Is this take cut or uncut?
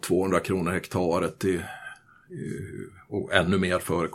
uncut